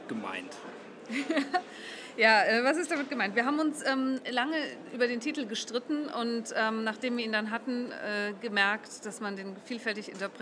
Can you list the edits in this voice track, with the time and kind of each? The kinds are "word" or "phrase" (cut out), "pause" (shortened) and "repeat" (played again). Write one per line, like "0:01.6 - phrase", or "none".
none